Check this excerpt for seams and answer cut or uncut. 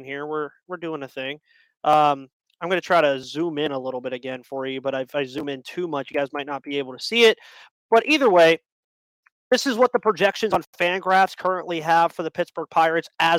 uncut